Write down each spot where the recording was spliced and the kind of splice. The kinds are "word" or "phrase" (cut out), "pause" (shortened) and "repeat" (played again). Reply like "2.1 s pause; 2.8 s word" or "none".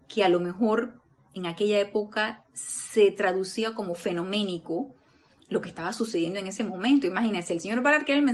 none

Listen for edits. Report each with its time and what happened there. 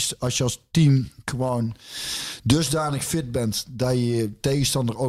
none

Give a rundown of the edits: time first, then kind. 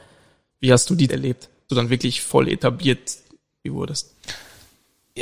1.1 s word; 1.7 s word; 3.6 s word

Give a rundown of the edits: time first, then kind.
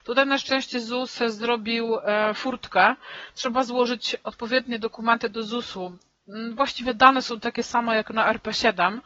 none

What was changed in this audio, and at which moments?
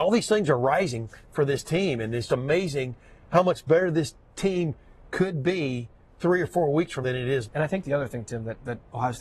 2.3 s word; 7.0 s word; 7.4 s word

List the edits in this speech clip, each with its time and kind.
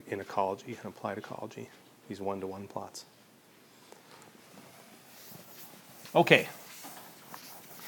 none

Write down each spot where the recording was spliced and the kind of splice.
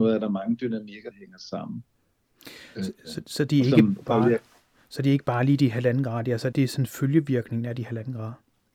1.1 s word; 6.5 s word

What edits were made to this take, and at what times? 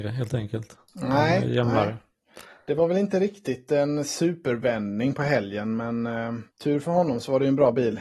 6.5 s pause

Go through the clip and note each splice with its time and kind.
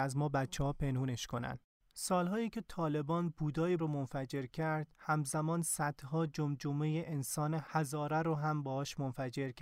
3.8 s word

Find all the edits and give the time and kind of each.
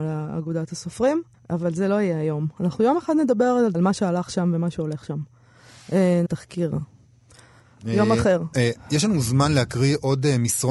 1.3 s pause; 3.7 s word; 6.3 s word

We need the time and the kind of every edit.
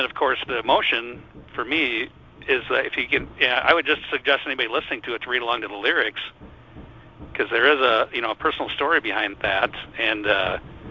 9.3 s word

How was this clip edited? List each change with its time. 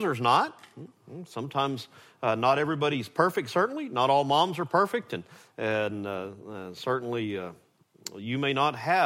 none

